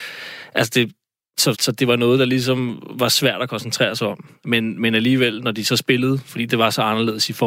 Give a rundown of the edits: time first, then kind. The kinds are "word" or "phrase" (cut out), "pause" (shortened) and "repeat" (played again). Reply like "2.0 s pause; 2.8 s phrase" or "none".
1.5 s word